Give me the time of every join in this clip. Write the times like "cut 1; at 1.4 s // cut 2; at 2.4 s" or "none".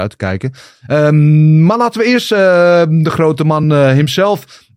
none